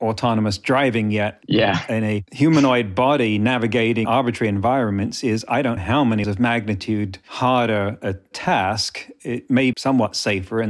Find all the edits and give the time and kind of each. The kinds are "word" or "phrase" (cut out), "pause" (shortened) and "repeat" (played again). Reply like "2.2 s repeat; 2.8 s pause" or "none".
4.0 s word; 5.8 s word; 6.2 s word; 9.7 s word